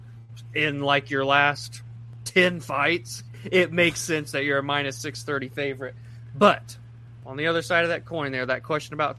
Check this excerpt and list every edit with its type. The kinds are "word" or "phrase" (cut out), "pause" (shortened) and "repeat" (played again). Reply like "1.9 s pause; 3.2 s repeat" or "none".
none

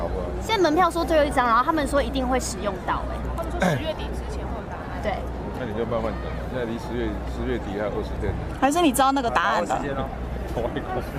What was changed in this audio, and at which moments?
none

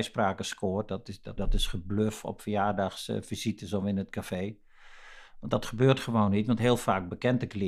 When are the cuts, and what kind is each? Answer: 1.4 s phrase

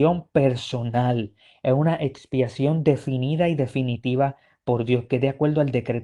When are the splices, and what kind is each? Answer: none

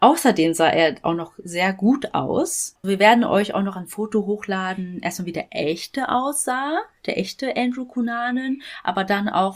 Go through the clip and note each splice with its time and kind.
2.8 s word

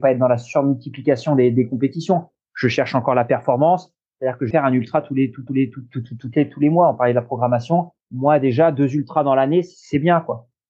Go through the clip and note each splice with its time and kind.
4.5 s phrase; 5.5 s repeat; 8.0 s pause

